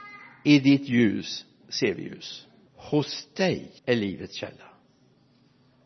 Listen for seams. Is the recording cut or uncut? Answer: cut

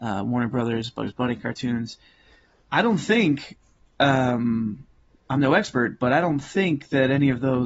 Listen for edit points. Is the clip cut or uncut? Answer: uncut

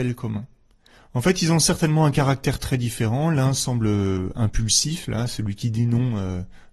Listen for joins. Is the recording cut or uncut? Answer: uncut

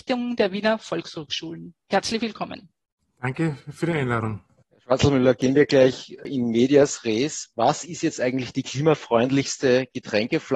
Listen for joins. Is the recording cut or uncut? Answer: uncut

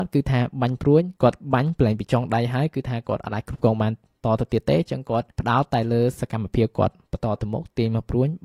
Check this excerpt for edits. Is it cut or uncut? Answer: cut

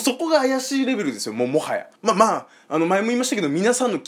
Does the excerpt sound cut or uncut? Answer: cut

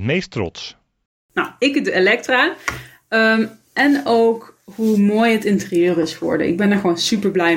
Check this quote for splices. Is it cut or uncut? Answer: uncut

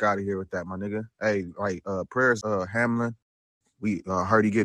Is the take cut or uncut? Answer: cut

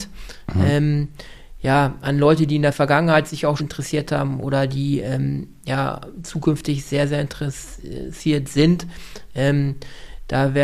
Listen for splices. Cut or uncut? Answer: cut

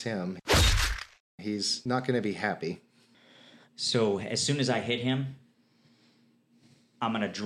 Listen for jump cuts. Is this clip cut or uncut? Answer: uncut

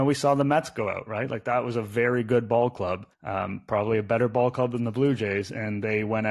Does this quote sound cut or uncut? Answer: cut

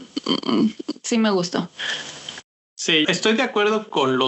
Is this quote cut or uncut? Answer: cut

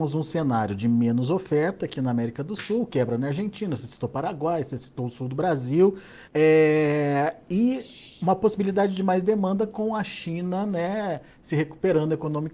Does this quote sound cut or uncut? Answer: cut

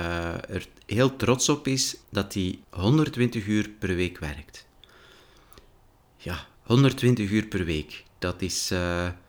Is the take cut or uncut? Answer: cut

